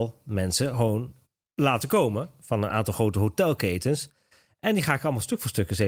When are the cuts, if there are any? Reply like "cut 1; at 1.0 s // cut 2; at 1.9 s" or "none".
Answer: none